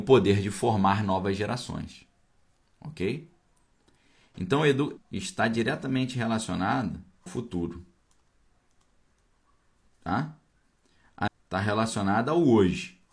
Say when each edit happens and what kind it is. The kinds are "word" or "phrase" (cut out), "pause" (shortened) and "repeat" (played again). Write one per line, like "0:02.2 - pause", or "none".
0:05.0 - word
0:07.3 - word
0:11.3 - word